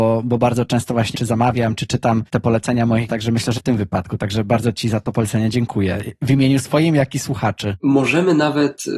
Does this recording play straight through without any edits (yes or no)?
no